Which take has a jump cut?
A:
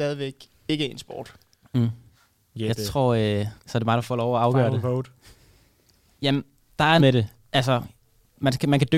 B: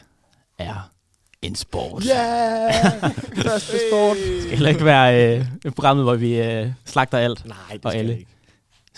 A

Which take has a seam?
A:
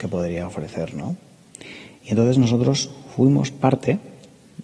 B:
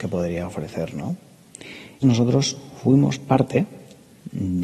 B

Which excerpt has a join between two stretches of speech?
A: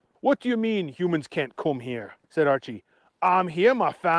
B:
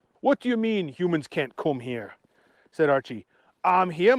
A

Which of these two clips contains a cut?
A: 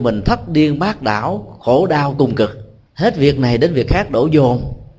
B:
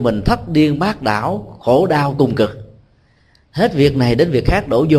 A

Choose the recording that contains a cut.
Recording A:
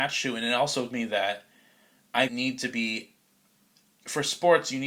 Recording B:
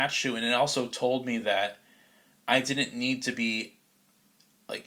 A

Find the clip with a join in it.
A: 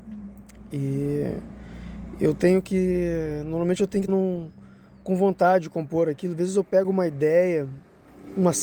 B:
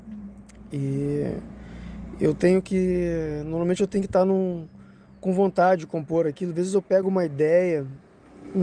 A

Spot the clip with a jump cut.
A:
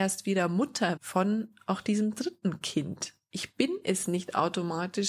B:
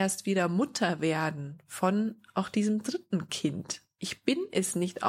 A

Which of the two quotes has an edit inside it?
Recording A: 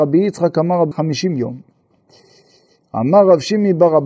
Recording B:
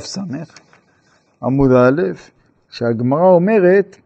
A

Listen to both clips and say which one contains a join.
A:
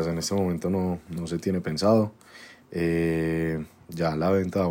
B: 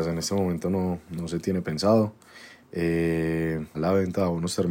B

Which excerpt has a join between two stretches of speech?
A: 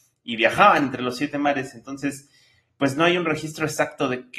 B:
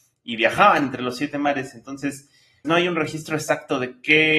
B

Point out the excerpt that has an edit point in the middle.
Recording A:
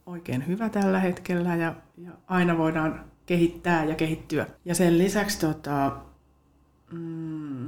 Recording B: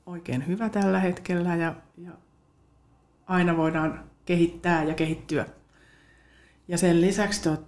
A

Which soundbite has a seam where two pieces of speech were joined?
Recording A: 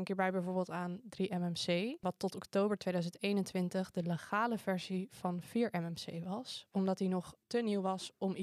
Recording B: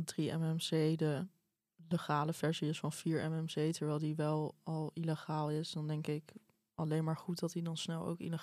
A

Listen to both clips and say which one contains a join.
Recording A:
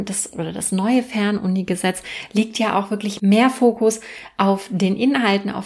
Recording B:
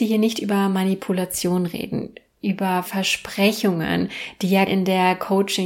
B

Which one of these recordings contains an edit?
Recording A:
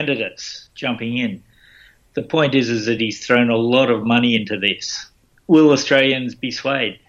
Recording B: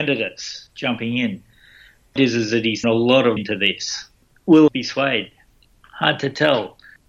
B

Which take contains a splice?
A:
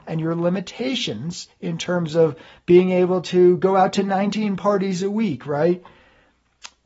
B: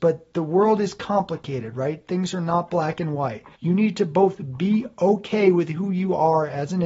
B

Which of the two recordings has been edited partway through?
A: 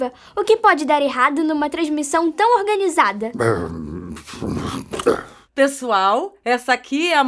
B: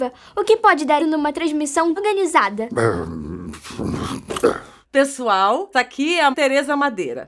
B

